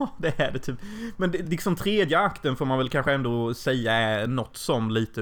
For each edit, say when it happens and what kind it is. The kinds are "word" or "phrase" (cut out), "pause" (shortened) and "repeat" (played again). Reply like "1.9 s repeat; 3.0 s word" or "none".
none